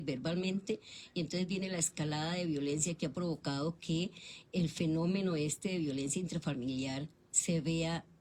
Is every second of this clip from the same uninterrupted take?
yes; 0 cuts

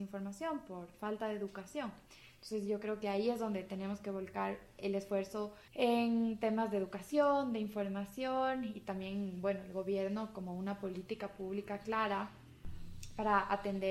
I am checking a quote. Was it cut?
yes; 1 cut; at 5.7 s

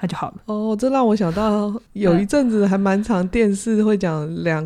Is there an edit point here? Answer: yes; 1 cut; at 1.9 s

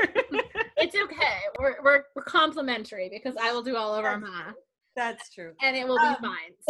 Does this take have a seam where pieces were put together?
no; 0 cuts

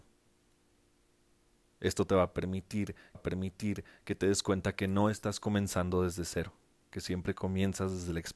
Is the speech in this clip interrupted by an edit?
yes; 1 cut; at 3.1 s

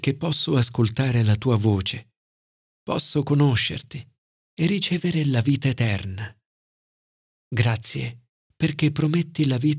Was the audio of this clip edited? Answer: no; 0 cuts

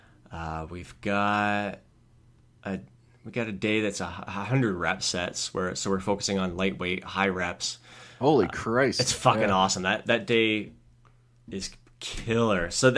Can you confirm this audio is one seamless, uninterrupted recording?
yes; 0 cuts

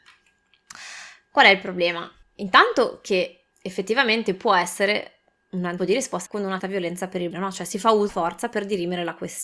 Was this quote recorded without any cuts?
no; 7 cuts; at 2.2 s, 3.5 s, 5.8 s, 6.3 s, 6.6 s, 7.3 s, 8.1 s

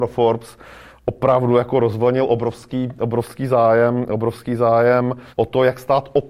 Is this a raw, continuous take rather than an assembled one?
no; 1 cut; at 5.3 s

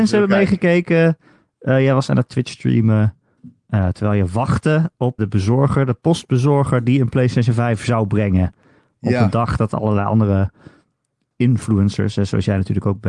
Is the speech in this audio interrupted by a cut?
yes; 1 cut; at 5.2 s

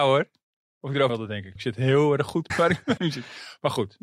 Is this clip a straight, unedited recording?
no; 4 cuts; at 1.1 s, 1.6 s, 2.5 s, 3.0 s

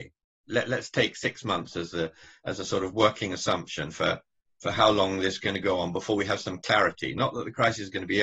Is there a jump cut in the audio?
yes; 1 cut; at 5.4 s

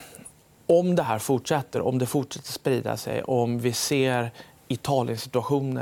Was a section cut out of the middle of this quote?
no; 0 cuts

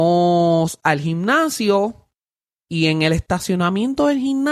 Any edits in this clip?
no; 0 cuts

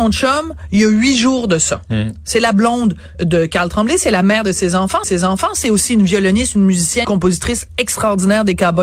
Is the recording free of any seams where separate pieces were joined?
no; 3 cuts; at 3.1 s, 5.0 s, 7.0 s

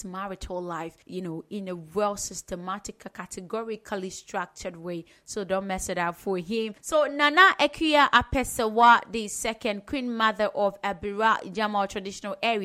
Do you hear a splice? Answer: yes; 2 cuts; at 1.0 s, 6.8 s

